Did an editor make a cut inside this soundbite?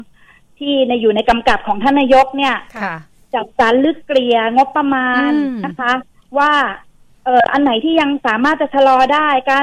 no; 0 cuts

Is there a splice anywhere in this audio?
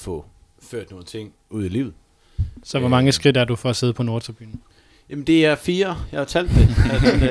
no; 0 cuts

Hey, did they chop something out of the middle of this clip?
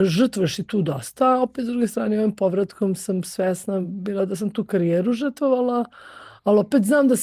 no; 0 cuts

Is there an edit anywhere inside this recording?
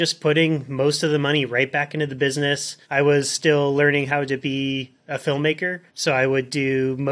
yes; 2 cuts; at 2.8 s, 5.9 s

